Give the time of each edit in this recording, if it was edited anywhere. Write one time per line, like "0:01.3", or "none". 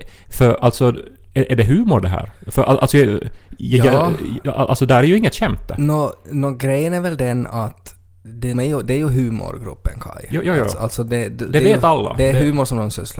0:02.4
0:08.5